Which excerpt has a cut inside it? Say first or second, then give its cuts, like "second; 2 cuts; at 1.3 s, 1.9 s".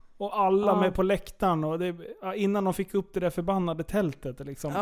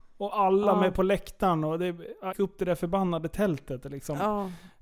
second; 1 cut; at 2.3 s